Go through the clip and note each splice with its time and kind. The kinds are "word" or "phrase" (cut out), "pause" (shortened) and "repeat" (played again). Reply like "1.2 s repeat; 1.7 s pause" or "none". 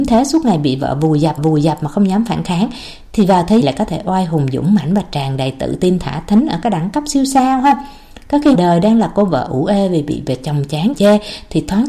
1.4 s repeat; 3.6 s phrase; 8.5 s word; 10.9 s word